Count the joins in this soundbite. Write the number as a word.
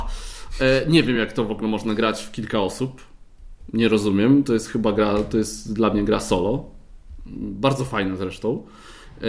zero